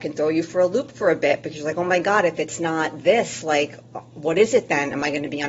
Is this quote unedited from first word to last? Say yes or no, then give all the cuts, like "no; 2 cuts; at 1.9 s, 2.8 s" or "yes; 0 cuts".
yes; 0 cuts